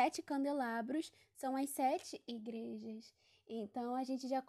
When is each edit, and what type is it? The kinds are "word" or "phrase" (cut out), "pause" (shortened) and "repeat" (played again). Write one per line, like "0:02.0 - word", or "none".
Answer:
none

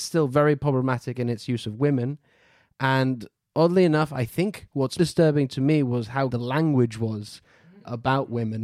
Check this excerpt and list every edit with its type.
0:05.0 - word
0:06.3 - word

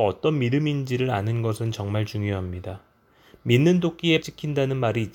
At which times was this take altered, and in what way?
0:04.2 - word

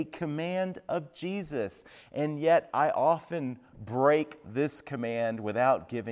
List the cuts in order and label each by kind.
none

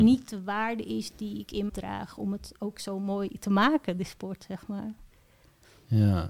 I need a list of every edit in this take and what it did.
0:01.7 - word

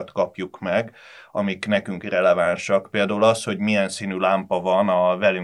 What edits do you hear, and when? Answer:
none

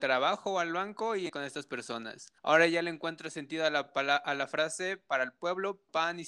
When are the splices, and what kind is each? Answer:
0:01.3 - word
0:02.4 - pause

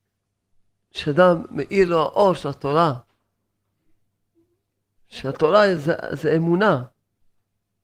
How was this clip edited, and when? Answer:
none

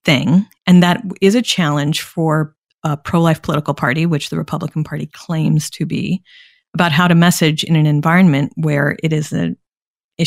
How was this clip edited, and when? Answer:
none

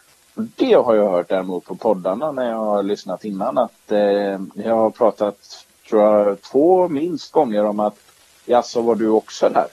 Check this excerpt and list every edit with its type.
0:05.7 - pause

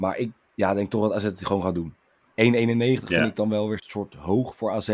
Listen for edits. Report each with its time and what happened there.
0:03.8 - word

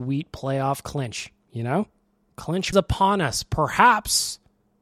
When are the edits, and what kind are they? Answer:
0:02.7 - phrase

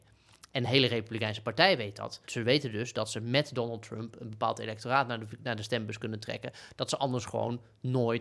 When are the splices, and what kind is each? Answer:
0:02.2 - pause

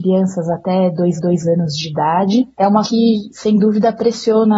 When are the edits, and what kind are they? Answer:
0:01.2 - repeat
0:02.5 - pause
0:02.8 - phrase

